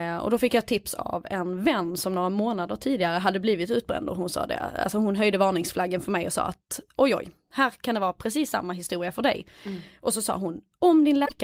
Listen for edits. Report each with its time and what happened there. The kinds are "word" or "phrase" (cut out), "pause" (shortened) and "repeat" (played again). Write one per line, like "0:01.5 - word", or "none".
none